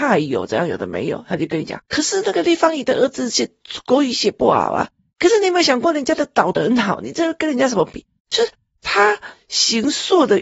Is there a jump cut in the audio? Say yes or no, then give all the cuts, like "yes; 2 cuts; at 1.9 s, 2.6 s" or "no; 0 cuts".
no; 0 cuts